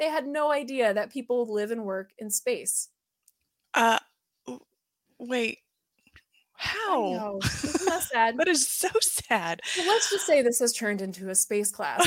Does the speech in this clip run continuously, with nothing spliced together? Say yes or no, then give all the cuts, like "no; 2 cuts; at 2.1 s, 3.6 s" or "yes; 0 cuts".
yes; 0 cuts